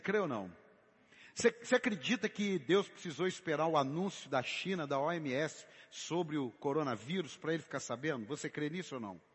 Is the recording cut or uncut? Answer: uncut